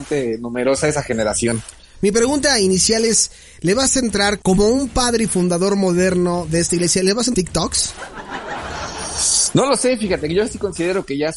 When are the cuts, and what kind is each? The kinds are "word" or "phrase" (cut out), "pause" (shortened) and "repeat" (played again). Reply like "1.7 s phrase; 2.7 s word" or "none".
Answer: 4.4 s word; 7.3 s phrase